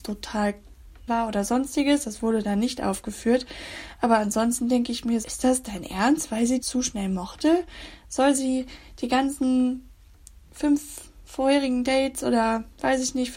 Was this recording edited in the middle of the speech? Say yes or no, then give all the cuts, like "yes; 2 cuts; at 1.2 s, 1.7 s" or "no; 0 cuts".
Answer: yes; 3 cuts; at 1.1 s, 5.2 s, 6.6 s